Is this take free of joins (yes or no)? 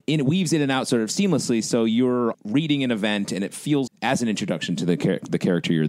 no